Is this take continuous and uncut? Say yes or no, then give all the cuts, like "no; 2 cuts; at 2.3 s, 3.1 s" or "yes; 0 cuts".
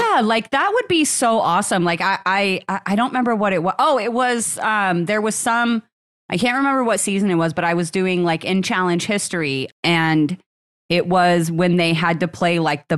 yes; 0 cuts